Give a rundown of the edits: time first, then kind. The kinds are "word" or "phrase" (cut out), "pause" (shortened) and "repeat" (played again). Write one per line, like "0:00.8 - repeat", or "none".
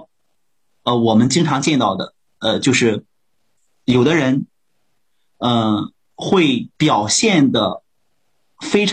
0:06.7 - pause